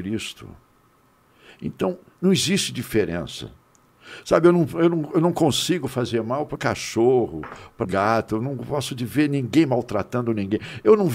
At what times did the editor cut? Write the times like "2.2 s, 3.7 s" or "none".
6.6 s, 7.8 s